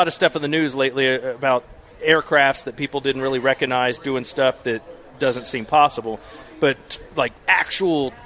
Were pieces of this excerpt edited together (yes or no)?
no